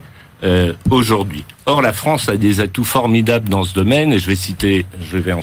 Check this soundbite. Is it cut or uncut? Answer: cut